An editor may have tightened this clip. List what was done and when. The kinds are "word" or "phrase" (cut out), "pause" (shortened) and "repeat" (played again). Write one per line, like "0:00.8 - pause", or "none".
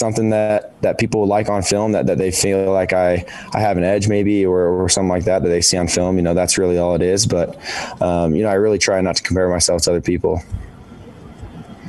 none